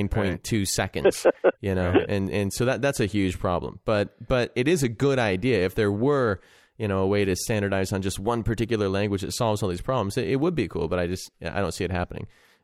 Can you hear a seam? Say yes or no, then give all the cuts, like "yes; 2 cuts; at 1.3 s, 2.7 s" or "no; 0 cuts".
no; 0 cuts